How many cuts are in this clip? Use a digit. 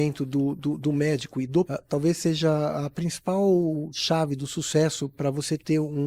1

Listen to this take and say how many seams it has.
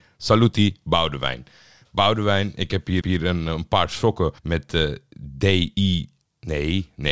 2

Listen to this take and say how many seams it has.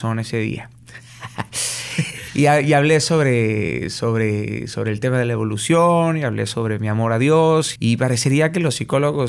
1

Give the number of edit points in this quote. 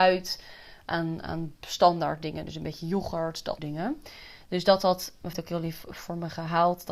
2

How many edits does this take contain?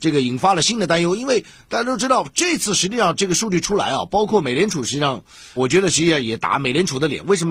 1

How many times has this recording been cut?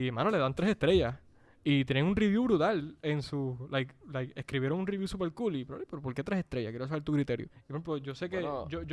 1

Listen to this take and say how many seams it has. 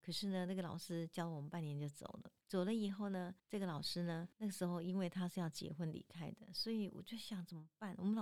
3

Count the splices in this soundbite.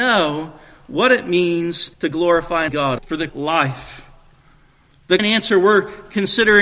5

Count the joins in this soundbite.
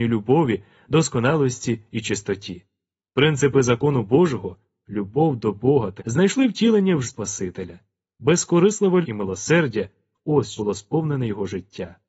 4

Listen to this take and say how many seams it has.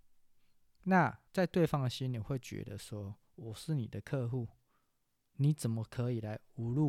1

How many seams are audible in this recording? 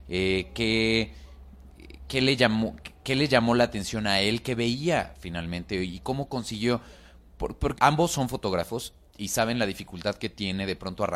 1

